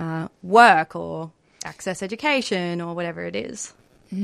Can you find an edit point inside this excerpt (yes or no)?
no